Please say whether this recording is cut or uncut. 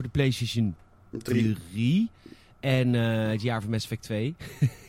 uncut